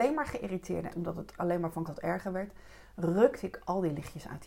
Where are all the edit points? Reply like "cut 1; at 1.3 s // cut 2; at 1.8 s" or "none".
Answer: cut 1; at 0.9 s // cut 2; at 1.4 s // cut 3; at 1.9 s